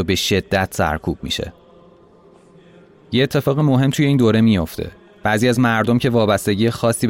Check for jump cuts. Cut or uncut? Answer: uncut